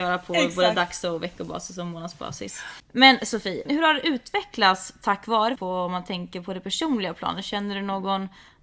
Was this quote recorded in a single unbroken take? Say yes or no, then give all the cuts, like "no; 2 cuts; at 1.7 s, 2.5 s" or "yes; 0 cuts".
no; 3 cuts; at 2.8 s, 3.7 s, 5.6 s